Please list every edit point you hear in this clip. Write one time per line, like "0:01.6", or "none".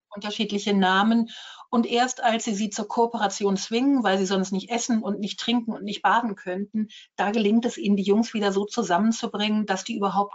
none